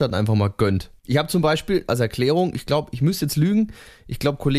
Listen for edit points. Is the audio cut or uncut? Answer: cut